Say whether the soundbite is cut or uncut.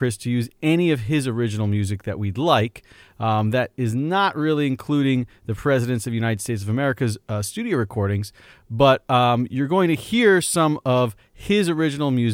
uncut